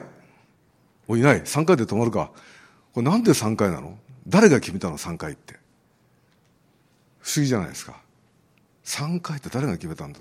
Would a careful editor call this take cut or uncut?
uncut